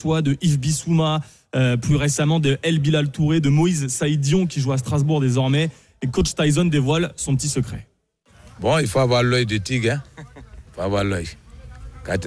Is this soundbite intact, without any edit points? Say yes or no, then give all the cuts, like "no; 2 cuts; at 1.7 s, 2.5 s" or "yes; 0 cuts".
yes; 0 cuts